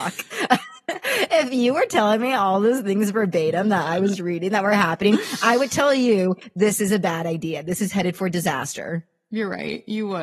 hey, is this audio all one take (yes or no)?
yes